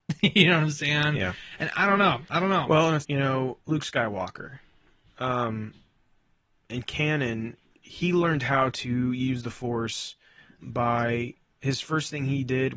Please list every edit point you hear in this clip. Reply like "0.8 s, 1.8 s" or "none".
3.0 s, 3.6 s, 7.6 s, 10.6 s

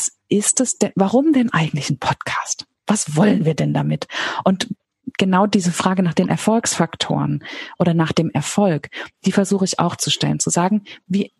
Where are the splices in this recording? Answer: none

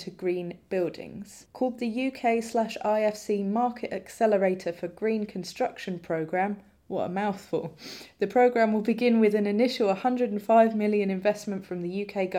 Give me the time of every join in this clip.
none

